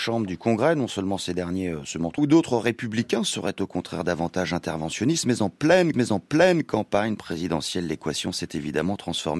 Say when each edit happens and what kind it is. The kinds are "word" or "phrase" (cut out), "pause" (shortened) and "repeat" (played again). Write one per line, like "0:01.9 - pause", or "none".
0:02.2 - phrase
0:05.9 - repeat